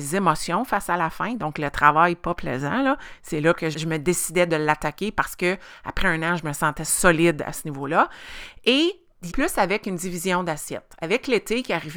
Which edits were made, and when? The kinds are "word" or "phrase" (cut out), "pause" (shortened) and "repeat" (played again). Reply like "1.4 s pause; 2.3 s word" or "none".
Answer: 3.7 s word; 9.3 s word